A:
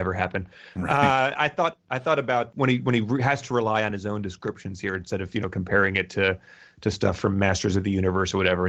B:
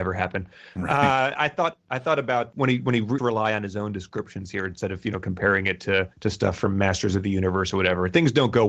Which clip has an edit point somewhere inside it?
B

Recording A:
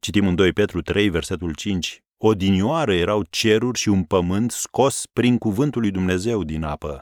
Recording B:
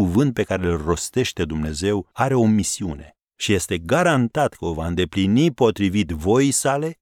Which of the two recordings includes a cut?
B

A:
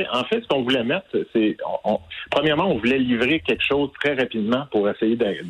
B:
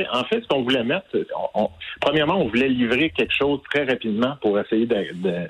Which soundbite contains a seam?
B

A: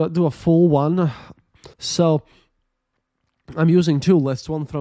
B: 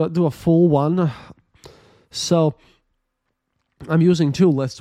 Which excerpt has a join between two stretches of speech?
A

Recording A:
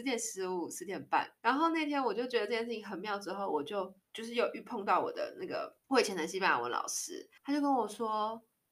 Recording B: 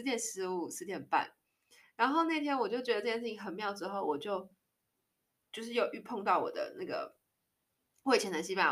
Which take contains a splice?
A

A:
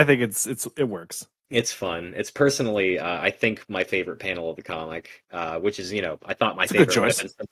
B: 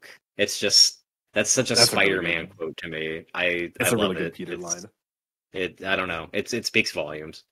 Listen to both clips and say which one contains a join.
A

